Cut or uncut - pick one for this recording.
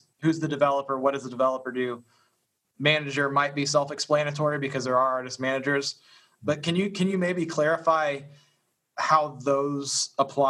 uncut